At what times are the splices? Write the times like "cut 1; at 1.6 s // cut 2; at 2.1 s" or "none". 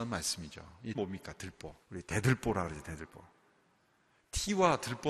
cut 1; at 0.9 s // cut 2; at 1.8 s

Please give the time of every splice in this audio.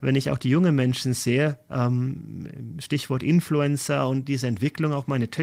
none

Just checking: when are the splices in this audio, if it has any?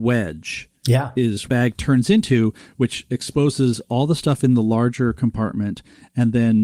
cut 1; at 1.5 s

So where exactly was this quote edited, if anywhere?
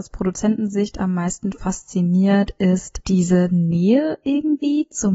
none

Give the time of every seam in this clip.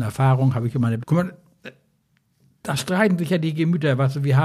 cut 1; at 1.0 s

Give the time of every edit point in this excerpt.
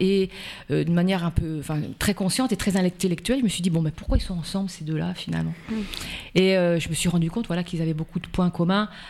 none

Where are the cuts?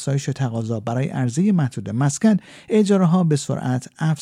none

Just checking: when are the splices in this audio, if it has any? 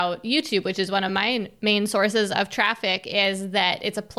none

